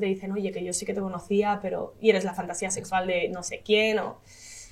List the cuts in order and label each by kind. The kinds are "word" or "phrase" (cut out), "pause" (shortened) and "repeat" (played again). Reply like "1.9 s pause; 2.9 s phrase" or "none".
none